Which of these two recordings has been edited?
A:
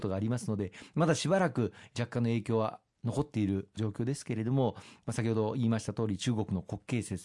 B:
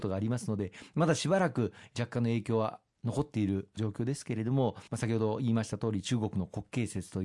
B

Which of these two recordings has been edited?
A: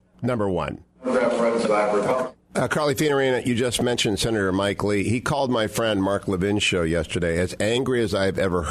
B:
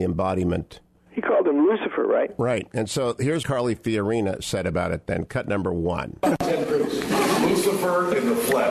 B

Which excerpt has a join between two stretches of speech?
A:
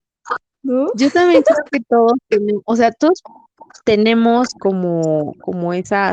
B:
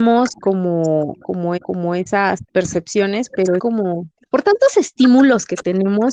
B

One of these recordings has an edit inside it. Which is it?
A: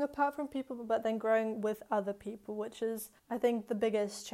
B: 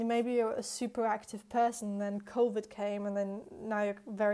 A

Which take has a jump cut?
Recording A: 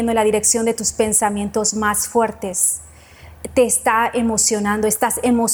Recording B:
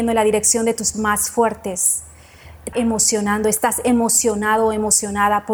B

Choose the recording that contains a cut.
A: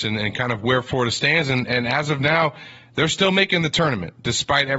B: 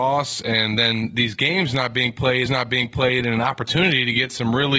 B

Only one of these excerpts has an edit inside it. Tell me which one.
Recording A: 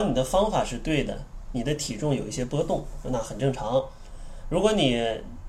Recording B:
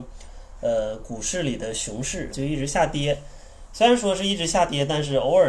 B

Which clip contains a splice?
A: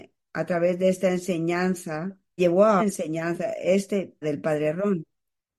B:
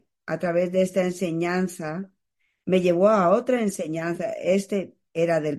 A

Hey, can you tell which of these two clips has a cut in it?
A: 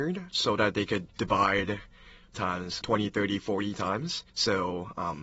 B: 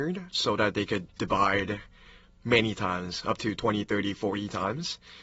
A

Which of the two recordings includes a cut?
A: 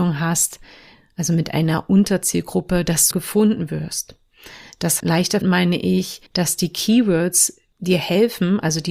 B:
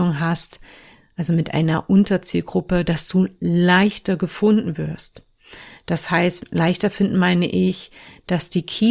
A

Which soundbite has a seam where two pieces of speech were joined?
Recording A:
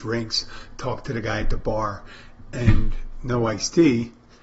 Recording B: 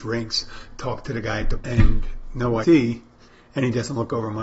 B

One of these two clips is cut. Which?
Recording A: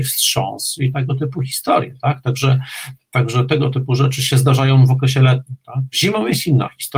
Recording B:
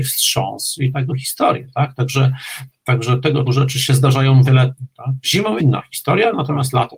B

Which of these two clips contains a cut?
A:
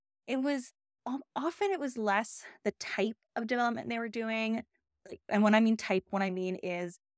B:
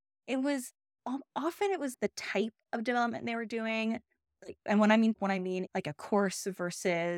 B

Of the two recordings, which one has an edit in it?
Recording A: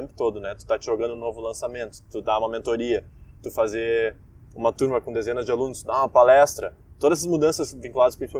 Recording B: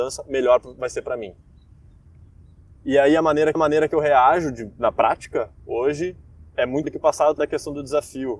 B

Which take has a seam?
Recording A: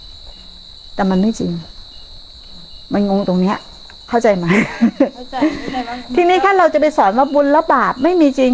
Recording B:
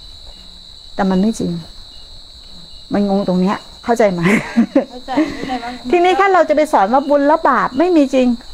B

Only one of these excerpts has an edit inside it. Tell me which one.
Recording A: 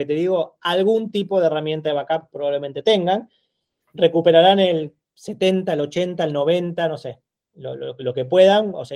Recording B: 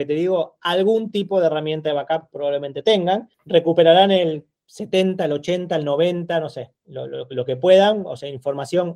B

